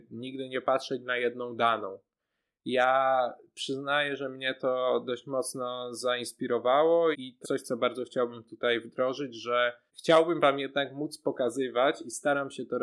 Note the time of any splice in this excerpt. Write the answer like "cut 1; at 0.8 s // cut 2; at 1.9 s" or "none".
cut 1; at 7.1 s // cut 2; at 7.4 s // cut 3; at 9.9 s